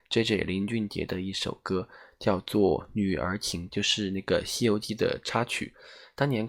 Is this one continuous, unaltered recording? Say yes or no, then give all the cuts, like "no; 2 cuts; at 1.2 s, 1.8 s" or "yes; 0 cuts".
no; 1 cut; at 3.7 s